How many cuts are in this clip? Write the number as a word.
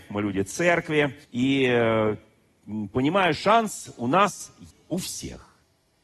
three